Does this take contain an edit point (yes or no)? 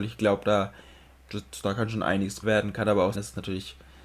yes